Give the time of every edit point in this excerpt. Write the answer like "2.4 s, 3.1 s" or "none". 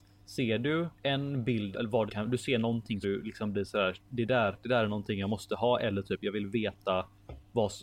0.9 s, 1.7 s, 2.1 s, 3.0 s